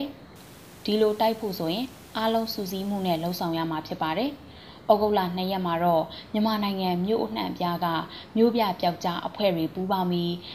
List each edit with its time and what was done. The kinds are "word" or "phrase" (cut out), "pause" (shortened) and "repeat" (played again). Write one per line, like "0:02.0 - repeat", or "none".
none

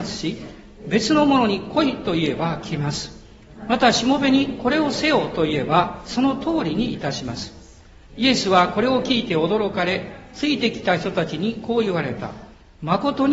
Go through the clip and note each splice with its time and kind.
none

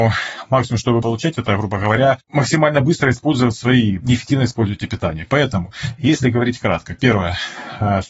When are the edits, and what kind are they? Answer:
0:01.0 - word
0:04.0 - phrase

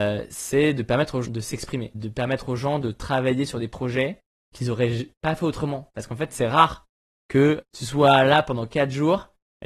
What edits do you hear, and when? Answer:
0:01.2 - word
0:01.9 - word
0:07.6 - word

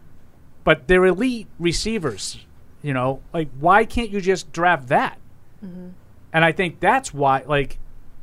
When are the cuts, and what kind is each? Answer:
none

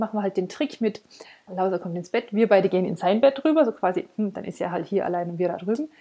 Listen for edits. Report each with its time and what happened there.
0:01.5 - word

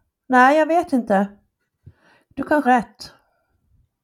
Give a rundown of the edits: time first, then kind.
0:02.6 - word

